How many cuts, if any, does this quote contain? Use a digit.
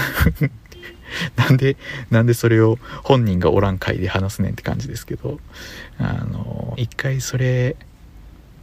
1